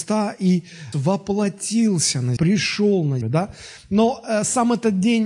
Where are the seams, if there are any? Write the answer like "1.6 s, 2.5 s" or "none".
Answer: 0.9 s, 2.4 s, 3.2 s

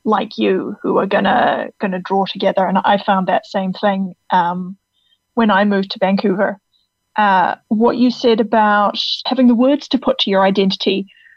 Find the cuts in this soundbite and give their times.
9.3 s

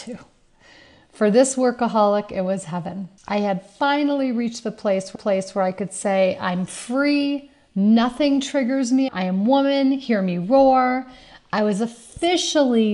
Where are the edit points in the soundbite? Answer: 3.2 s, 5.2 s, 9.1 s

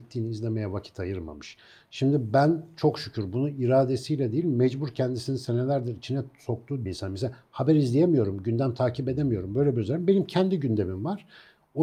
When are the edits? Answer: 6.9 s

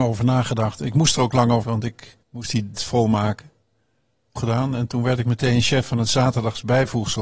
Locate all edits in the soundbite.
1.6 s, 2.2 s, 2.8 s, 4.4 s

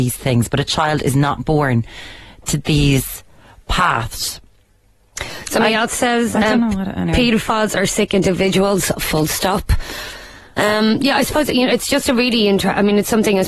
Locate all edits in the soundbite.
none

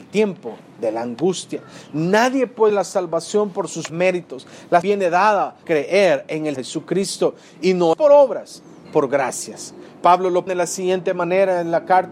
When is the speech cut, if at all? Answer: 2.7 s, 3.9 s, 4.8 s, 5.6 s, 6.6 s, 7.9 s, 8.8 s, 10.5 s

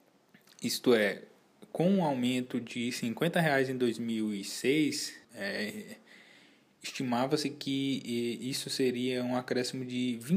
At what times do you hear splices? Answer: 5.2 s

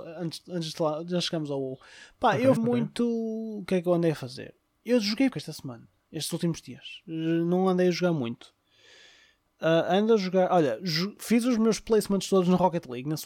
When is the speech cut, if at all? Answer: 2.6 s, 5.3 s

